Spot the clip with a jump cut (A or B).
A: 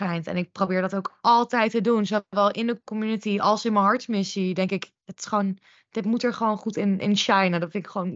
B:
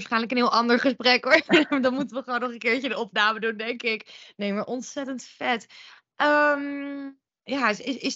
A